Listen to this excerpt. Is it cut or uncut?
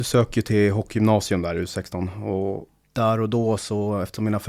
cut